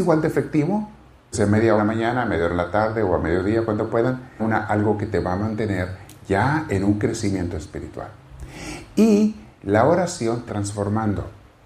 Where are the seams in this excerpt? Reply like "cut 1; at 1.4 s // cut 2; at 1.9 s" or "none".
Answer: cut 1; at 1.3 s // cut 2; at 1.8 s // cut 3; at 4.4 s // cut 4; at 10.5 s